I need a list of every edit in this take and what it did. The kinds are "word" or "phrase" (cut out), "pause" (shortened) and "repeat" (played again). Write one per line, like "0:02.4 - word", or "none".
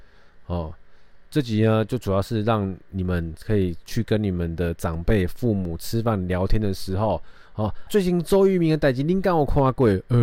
0:01.3 - pause
0:07.9 - word